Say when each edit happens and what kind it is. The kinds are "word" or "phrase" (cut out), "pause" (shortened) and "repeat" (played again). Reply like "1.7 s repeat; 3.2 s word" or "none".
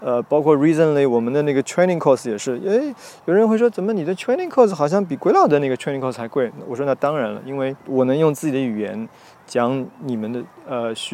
7.8 s pause